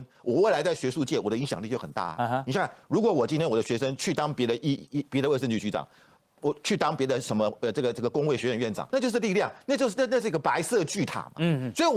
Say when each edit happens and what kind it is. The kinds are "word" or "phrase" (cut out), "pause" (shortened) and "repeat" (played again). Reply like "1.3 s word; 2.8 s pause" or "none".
8.9 s word